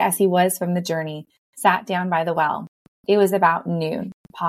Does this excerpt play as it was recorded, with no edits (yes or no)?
yes